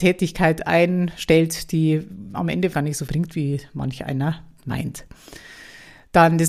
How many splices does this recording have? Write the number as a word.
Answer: three